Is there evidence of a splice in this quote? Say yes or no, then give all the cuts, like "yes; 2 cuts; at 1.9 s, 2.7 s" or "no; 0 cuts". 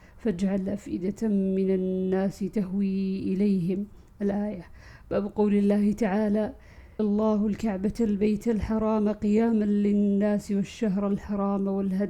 yes; 1 cut; at 7.0 s